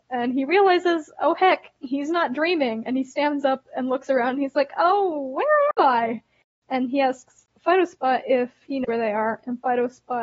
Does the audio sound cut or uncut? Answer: uncut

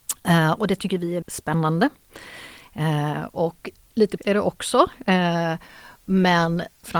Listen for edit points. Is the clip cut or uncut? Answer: cut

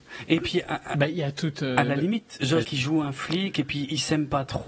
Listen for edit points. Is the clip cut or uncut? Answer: cut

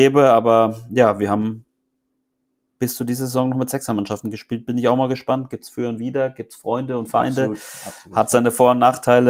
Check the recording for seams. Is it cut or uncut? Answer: uncut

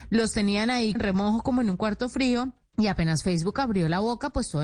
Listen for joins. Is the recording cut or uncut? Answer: cut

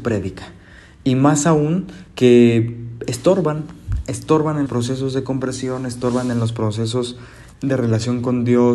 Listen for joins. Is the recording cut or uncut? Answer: cut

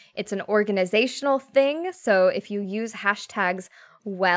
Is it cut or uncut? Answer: uncut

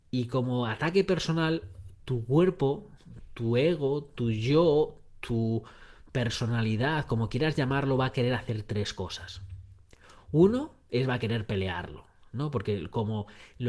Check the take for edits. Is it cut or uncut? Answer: uncut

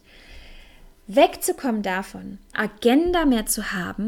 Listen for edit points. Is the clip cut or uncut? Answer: cut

